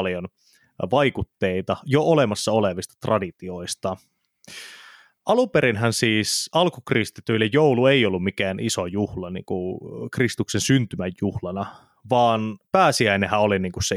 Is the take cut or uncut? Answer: uncut